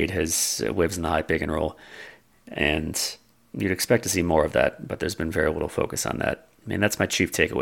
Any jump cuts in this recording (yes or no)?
no